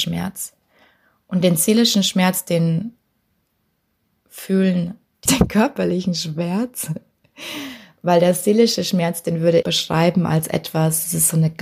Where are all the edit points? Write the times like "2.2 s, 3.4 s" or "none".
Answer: 5.3 s, 9.6 s